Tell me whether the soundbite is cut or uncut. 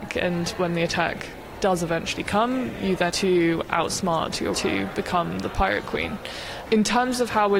cut